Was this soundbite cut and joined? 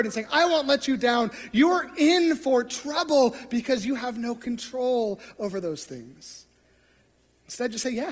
no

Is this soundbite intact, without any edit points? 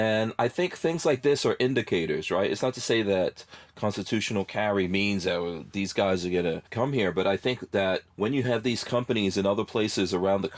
no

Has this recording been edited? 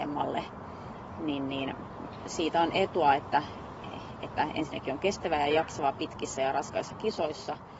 no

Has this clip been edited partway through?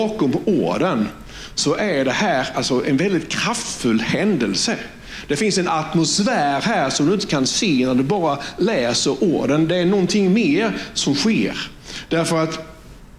no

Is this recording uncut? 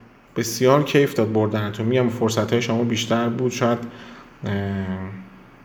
yes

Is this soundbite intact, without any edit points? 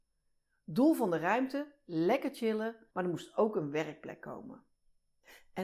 no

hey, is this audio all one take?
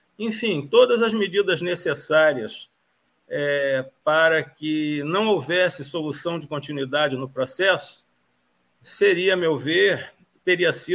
yes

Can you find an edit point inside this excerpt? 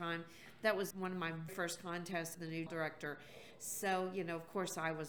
yes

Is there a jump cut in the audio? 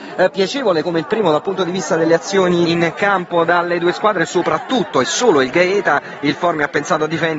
yes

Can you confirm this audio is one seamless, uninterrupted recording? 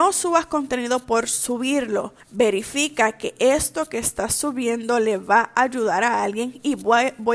no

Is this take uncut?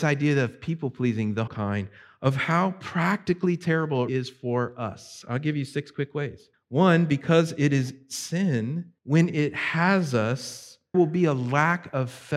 no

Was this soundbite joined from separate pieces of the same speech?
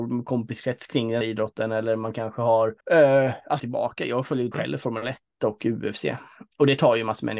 yes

